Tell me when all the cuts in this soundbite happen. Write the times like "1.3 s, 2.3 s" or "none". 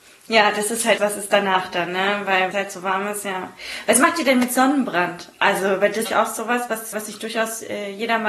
1.0 s, 2.5 s, 6.1 s, 6.9 s